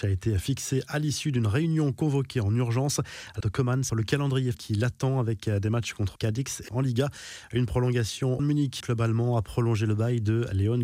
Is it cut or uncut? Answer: cut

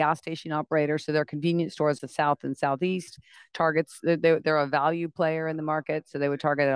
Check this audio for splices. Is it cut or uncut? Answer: cut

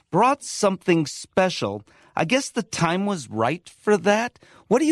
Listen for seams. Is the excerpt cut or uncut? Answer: uncut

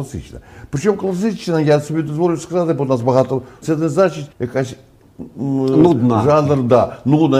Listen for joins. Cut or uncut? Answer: cut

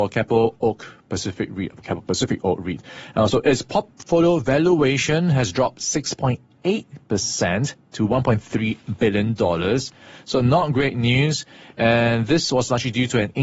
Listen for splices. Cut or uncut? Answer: uncut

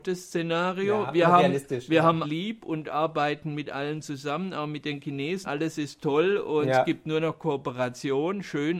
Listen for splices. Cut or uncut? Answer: cut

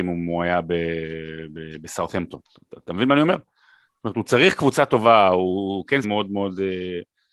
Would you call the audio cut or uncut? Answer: cut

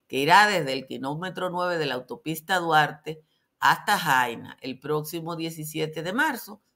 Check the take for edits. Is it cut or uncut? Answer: uncut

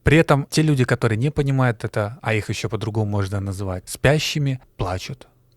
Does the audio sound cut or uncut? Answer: uncut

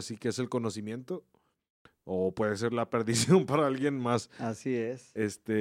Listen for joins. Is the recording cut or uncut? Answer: uncut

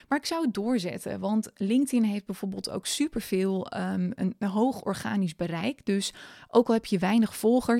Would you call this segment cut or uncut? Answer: uncut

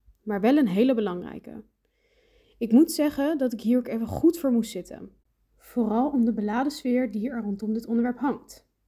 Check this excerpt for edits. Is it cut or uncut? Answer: uncut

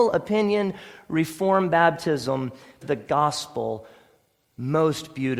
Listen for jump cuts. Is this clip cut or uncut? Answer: cut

